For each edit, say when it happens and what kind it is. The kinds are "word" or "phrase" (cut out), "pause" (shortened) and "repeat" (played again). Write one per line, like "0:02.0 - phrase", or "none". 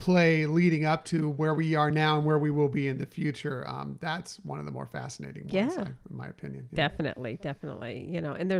none